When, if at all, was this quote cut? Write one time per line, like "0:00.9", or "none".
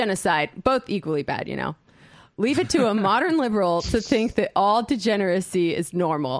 none